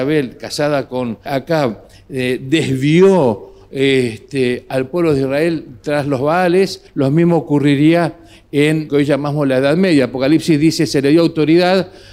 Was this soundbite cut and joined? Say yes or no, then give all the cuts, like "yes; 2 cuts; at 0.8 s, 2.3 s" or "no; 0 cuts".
yes; 3 cuts; at 1.3 s, 6.9 s, 8.9 s